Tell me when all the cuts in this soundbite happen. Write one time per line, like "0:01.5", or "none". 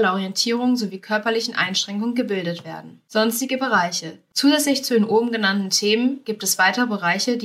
none